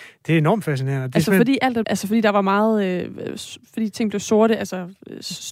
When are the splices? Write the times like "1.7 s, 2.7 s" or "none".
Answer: 1.8 s